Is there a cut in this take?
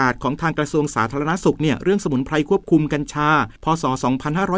yes; 1 cut; at 3.6 s

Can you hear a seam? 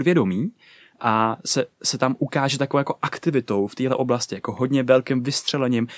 no; 0 cuts

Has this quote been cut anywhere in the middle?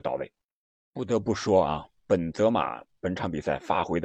no; 0 cuts

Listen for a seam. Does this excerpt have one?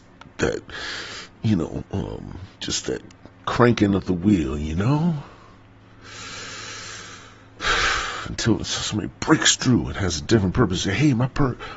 yes; 1 cut; at 2.5 s

